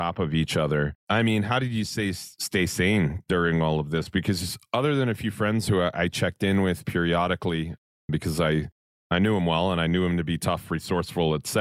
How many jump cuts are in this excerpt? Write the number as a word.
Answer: one